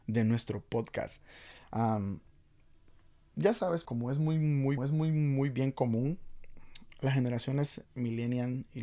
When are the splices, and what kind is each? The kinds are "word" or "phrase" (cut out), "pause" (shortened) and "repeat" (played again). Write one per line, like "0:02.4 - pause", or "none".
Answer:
0:03.9 - word
0:04.8 - repeat
0:07.9 - pause

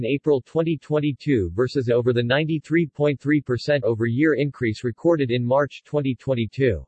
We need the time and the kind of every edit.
0:01.9 - phrase
0:03.8 - word

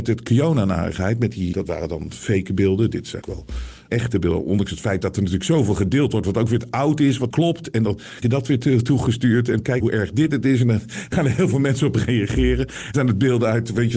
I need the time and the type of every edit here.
0:01.5 - word
0:03.2 - word
0:03.9 - word
0:07.3 - word
0:08.2 - word
0:09.8 - word
0:11.1 - word
0:12.9 - word

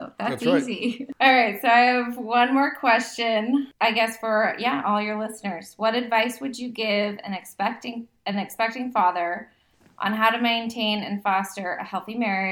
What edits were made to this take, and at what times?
none

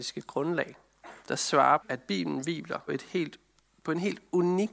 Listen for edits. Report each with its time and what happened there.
0:01.2 - pause
0:01.8 - word
0:02.9 - word

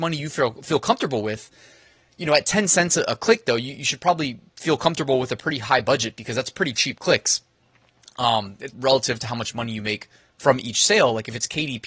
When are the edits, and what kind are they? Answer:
0:08.7 - word

